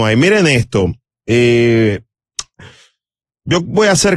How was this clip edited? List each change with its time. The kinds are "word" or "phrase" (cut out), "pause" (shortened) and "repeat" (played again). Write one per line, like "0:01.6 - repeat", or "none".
none